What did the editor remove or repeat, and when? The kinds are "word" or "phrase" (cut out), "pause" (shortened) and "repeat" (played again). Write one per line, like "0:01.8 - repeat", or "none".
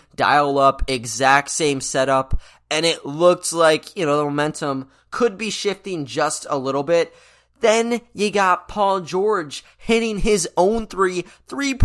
none